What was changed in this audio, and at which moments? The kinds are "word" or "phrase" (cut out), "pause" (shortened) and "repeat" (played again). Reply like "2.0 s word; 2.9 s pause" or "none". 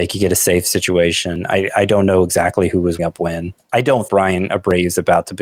3.0 s word; 4.1 s word